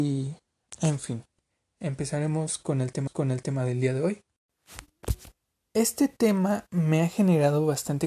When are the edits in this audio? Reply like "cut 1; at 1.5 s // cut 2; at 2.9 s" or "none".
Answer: cut 1; at 3.1 s // cut 2; at 5.3 s